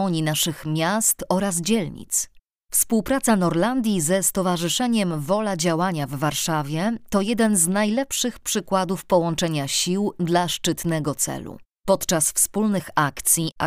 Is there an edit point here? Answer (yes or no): no